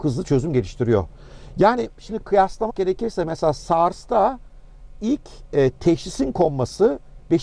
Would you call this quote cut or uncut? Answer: cut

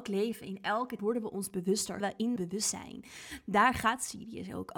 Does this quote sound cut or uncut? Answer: cut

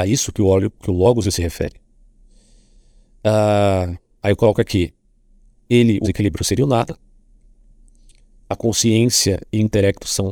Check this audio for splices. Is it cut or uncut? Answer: cut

